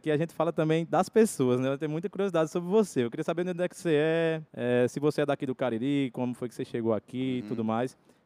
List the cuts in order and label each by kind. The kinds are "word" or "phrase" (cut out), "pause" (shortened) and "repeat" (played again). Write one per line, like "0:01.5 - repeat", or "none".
0:04.5 - pause